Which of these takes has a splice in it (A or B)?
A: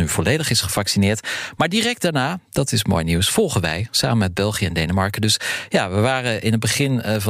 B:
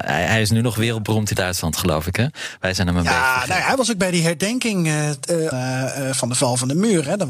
B